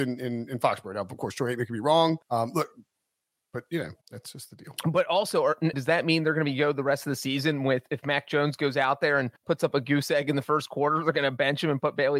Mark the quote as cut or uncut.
cut